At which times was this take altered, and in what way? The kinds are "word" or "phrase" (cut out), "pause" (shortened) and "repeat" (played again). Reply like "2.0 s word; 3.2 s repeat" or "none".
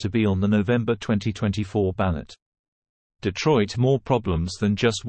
3.7 s word